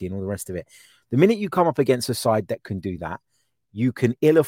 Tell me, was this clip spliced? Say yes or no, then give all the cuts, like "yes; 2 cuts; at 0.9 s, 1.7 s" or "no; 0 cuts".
no; 0 cuts